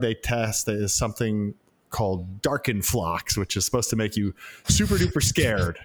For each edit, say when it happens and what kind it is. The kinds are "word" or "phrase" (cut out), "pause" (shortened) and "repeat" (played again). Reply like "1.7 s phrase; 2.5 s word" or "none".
none